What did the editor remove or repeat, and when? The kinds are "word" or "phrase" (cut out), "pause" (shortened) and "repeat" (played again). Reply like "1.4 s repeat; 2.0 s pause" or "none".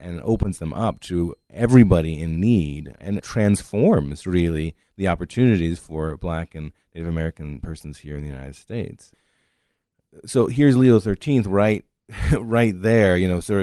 none